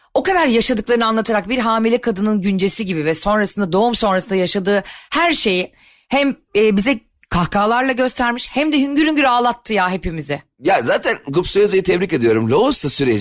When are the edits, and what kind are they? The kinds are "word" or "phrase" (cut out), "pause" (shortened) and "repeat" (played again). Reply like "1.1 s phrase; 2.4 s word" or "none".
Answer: none